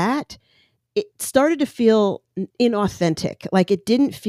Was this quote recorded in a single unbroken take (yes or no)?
no